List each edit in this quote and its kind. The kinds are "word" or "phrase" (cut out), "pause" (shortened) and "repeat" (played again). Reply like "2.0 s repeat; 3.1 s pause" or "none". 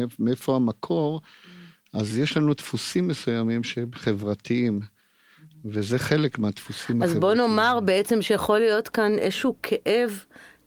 none